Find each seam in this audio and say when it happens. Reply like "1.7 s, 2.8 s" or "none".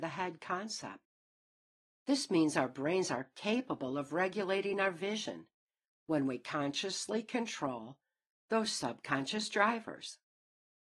none